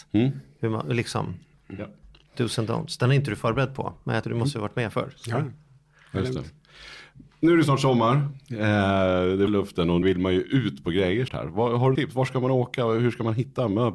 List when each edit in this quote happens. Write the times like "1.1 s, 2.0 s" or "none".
4.2 s, 9.5 s, 10.0 s, 11.3 s, 12.0 s